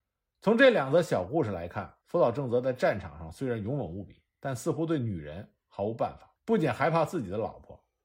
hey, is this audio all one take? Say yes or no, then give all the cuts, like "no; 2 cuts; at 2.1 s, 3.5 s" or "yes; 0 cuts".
no; 3 cuts; at 2.0 s, 4.3 s, 6.4 s